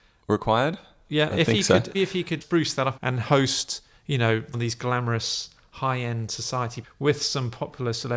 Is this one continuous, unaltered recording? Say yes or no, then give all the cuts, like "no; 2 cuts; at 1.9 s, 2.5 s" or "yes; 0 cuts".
no; 6 cuts; at 1.3 s, 1.9 s, 2.4 s, 3.0 s, 4.5 s, 6.8 s